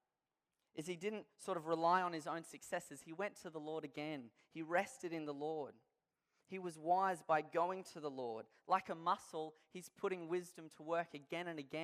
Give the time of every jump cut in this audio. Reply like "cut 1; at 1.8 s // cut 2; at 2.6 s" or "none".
none